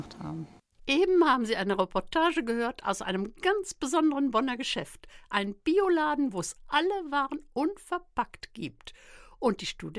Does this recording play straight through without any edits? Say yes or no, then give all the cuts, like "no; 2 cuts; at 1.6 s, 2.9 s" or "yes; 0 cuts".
yes; 0 cuts